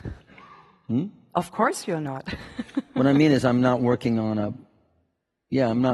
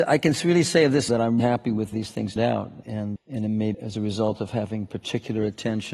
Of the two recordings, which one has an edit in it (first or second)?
second